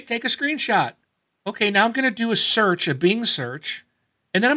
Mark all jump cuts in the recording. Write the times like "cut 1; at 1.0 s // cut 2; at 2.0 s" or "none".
cut 1; at 1.0 s